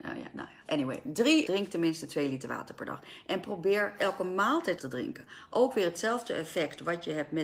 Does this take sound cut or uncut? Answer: cut